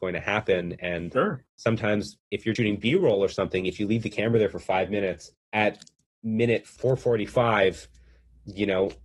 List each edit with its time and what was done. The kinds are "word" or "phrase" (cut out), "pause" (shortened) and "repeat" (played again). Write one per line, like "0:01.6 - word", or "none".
0:01.5 - pause
0:02.6 - word
0:05.4 - pause